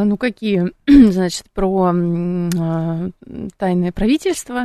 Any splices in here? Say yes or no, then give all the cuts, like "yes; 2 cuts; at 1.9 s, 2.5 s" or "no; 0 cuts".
no; 0 cuts